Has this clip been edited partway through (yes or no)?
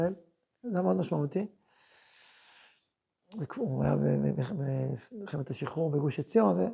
no